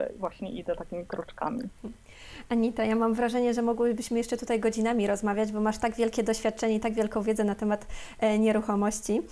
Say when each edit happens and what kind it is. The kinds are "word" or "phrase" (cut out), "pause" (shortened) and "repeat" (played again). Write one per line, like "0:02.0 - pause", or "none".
none